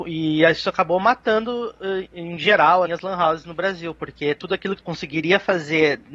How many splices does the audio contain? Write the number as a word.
two